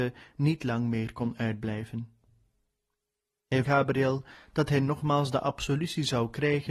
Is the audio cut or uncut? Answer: cut